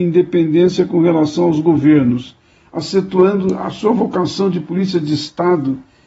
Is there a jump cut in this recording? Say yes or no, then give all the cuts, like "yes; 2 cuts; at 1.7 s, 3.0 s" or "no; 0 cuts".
no; 0 cuts